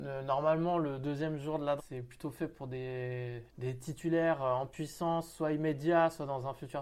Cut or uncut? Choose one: cut